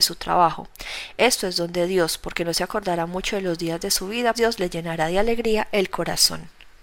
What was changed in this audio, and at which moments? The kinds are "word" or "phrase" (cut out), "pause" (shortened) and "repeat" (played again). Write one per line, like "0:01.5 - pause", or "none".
0:04.3 - word